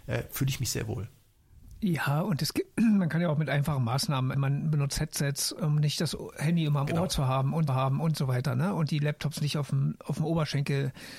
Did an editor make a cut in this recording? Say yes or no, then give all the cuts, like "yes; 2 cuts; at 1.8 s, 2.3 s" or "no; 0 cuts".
yes; 2 cuts; at 4.3 s, 7.7 s